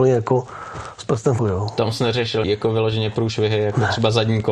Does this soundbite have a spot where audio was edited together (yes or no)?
yes